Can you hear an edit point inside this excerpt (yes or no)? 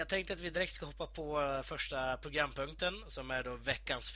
no